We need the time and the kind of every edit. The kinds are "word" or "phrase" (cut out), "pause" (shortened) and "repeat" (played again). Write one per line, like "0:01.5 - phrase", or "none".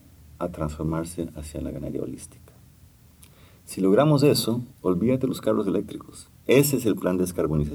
0:04.7 - pause